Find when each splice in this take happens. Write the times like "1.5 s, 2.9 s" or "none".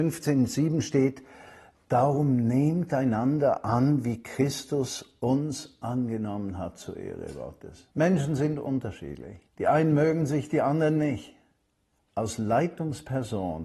7.9 s, 9.5 s